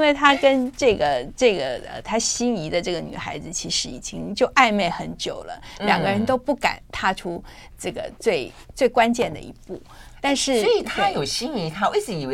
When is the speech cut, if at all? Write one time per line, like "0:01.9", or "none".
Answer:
none